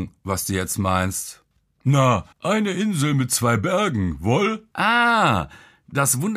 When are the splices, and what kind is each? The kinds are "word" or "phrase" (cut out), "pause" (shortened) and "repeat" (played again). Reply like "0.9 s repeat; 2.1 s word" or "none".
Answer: 2.3 s pause; 4.7 s pause